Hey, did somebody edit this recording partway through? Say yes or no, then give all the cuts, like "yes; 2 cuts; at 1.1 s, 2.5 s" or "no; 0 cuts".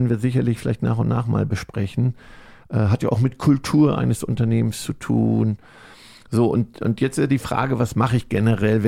no; 0 cuts